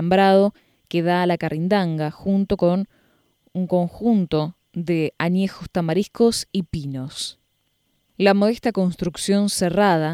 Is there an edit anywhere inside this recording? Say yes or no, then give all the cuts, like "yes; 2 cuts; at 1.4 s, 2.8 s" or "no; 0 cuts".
no; 0 cuts